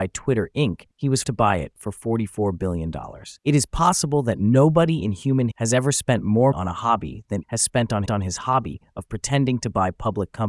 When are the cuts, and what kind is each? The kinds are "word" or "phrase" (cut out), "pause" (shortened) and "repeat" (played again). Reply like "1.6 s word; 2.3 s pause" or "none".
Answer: 0.9 s pause; 1.2 s word; 3.4 s pause; 5.5 s word; 6.5 s word; 7.4 s phrase; 8.1 s repeat